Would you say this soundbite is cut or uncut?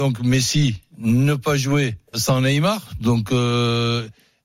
cut